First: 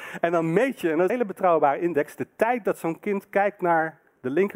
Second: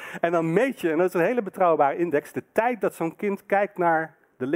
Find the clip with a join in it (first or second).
first